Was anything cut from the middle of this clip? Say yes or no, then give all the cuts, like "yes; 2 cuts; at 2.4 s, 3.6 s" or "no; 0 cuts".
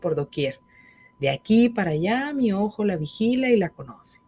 no; 0 cuts